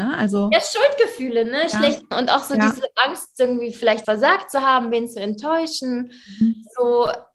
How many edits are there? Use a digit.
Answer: 2